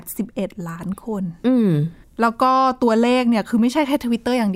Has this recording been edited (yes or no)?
yes